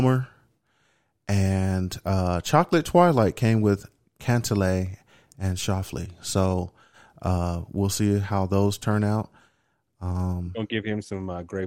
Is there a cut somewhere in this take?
no; 0 cuts

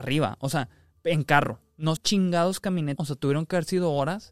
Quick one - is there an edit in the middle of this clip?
yes; 2 cuts; at 2.0 s, 3.0 s

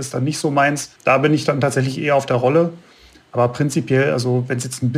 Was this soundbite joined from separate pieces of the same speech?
yes; 1 cut; at 1.0 s

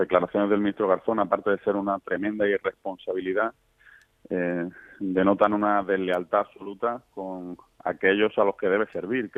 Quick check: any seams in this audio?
no; 0 cuts

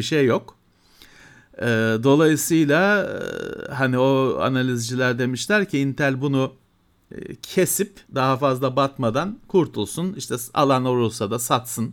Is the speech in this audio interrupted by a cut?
yes; 1 cut; at 8.1 s

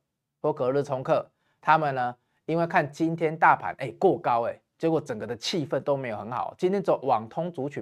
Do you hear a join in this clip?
no; 0 cuts

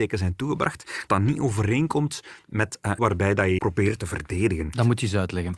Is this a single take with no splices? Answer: no; 3 cuts; at 1.1 s, 3.0 s, 3.6 s

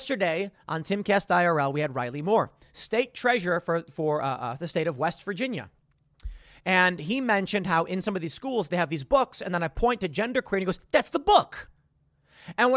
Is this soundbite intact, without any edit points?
yes; 0 cuts

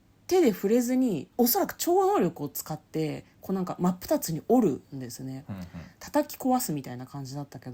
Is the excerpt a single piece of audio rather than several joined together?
no; 2 cuts; at 1.3 s, 3.3 s

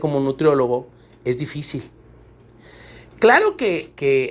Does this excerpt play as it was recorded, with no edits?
yes; 0 cuts

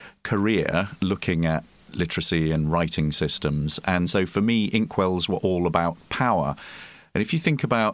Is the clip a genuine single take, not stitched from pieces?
yes; 0 cuts

